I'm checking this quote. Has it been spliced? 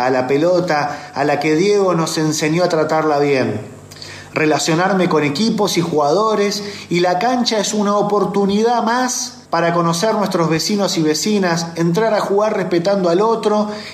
yes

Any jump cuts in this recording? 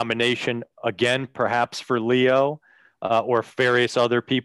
no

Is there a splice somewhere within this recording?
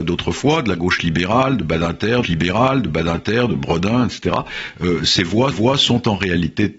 yes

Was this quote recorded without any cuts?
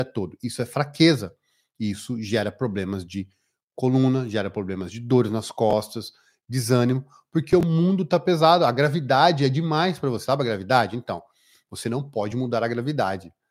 yes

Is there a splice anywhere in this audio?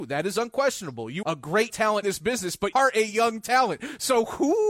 yes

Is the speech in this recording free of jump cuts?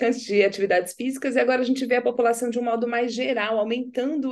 yes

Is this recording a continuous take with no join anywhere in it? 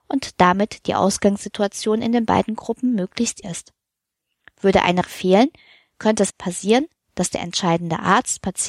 no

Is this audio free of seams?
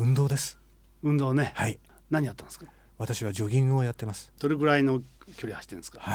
yes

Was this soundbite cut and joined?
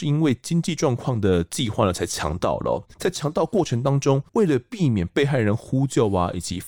yes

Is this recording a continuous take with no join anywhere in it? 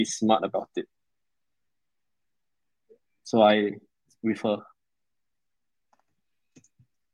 yes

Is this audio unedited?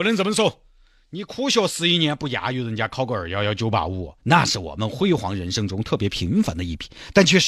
no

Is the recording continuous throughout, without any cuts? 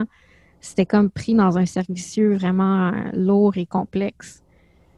yes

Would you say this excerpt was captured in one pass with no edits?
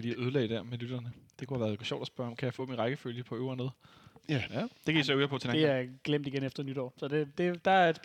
yes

